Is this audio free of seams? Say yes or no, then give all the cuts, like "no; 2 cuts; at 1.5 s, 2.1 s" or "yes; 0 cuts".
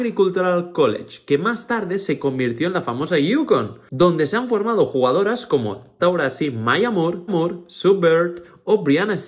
no; 2 cuts; at 6.0 s, 7.3 s